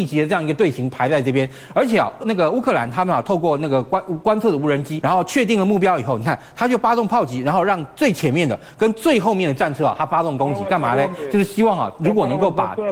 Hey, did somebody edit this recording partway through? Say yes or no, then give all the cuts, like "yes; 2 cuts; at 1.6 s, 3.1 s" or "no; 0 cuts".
yes; 2 cuts; at 2.2 s, 5.0 s